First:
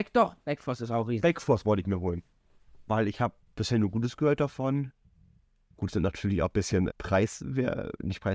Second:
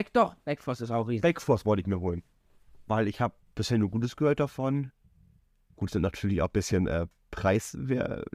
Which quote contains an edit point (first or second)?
first